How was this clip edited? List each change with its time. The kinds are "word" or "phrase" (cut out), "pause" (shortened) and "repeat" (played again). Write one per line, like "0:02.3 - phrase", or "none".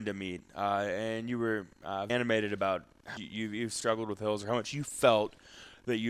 0:02.1 - word
0:03.2 - word